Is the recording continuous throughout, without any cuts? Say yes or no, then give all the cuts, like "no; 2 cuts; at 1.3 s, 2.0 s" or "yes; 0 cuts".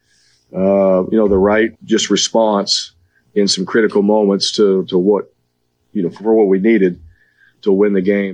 no; 1 cut; at 1.7 s